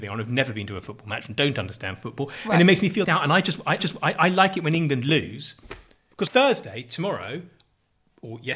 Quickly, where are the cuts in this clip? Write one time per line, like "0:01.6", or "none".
0:03.0
0:03.8
0:06.3

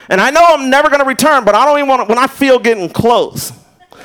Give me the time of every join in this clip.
none

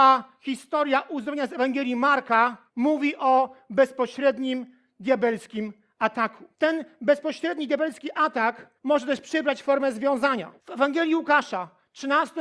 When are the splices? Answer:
0:02.7
0:06.5
0:08.8
0:10.6

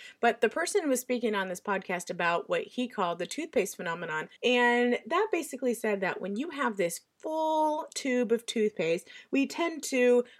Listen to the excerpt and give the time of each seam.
0:04.4

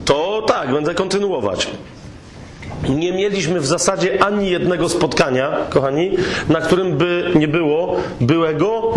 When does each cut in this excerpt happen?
none

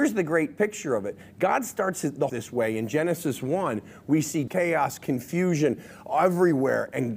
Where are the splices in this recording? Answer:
0:02.3
0:04.5

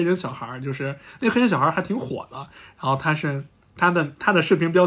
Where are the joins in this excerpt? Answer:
none

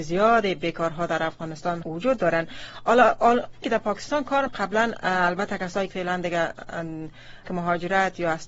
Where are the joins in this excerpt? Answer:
0:01.8
0:03.6
0:04.5
0:05.9
0:07.4

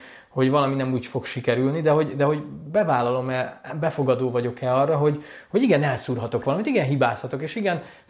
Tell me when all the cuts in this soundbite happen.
none

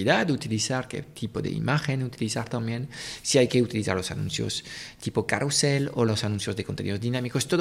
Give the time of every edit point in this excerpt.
none

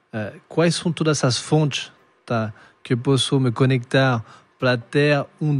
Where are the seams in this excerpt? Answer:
none

